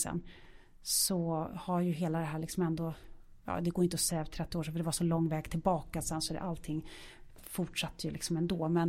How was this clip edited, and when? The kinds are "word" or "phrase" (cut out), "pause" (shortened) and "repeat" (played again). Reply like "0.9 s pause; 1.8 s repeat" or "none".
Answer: 3.4 s pause